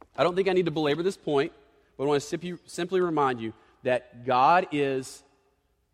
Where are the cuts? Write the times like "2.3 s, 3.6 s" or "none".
none